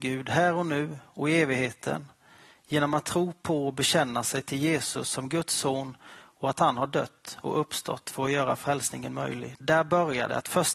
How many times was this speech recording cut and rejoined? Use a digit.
0